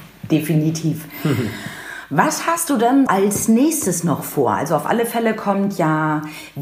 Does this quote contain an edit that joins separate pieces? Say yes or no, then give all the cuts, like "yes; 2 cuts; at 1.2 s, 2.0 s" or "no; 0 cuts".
yes; 1 cut; at 3.1 s